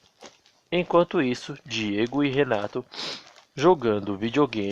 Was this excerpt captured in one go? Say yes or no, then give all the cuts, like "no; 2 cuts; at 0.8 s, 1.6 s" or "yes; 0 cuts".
yes; 0 cuts